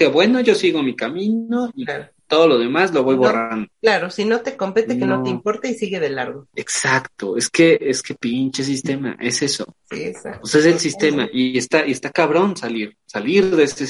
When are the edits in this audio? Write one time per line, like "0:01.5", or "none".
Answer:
0:03.7
0:06.5
0:09.8